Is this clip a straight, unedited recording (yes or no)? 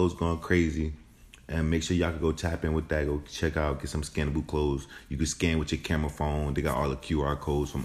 yes